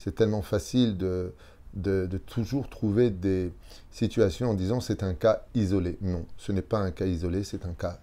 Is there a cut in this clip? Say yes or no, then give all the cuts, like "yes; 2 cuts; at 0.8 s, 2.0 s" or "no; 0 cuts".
no; 0 cuts